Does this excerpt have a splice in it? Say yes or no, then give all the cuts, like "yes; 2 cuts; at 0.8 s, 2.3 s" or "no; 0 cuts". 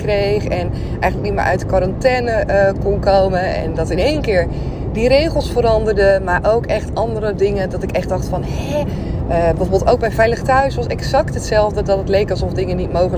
no; 0 cuts